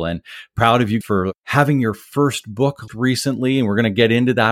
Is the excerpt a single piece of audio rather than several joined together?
no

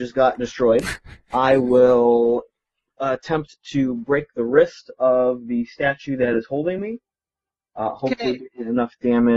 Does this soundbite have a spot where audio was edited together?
no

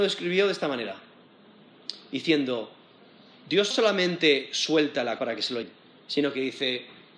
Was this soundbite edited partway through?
yes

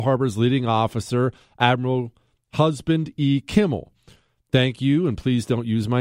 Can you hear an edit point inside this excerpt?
no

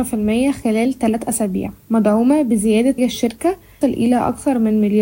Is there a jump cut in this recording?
yes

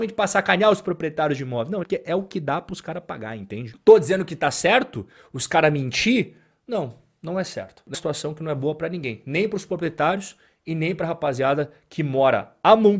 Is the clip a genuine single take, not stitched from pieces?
no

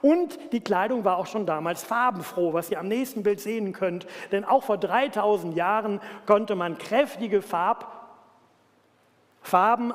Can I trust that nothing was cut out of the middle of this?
yes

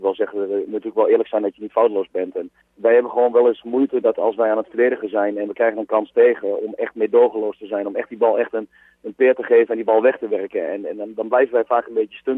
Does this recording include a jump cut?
yes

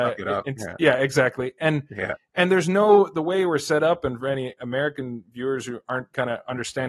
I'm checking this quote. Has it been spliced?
no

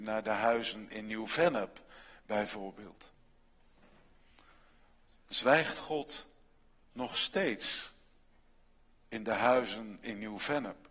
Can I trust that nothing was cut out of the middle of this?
yes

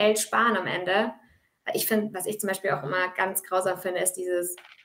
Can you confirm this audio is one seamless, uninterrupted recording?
yes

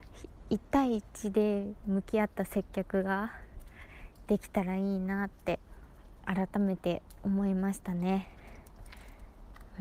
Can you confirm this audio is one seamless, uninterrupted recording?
no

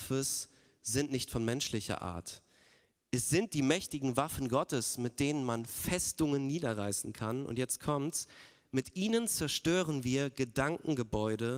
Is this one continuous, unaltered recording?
yes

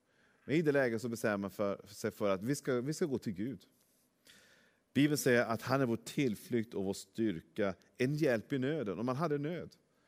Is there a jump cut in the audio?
no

